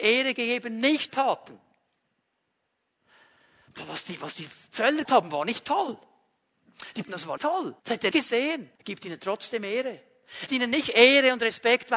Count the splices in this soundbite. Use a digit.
8